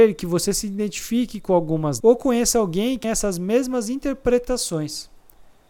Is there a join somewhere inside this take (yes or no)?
yes